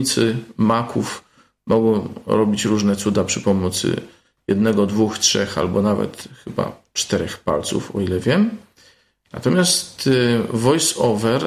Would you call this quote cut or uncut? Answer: uncut